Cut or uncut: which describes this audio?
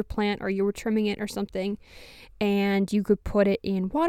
uncut